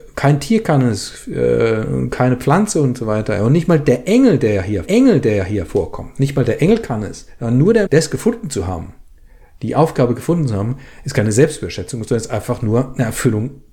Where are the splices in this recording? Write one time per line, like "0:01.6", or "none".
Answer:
0:04.9
0:07.9